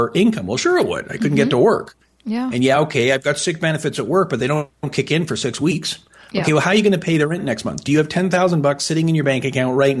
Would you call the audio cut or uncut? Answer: uncut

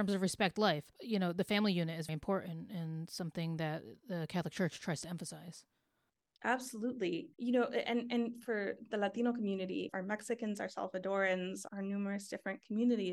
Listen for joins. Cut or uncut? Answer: cut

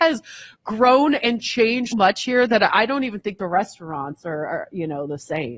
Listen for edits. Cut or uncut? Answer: cut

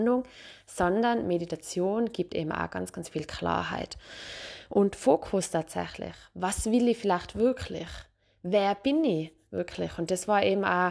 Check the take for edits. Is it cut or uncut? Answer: uncut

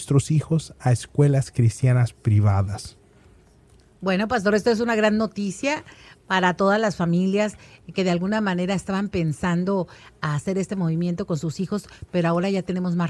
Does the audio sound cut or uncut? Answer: uncut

